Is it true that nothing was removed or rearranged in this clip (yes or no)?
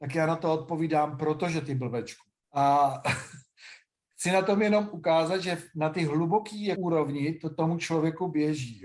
yes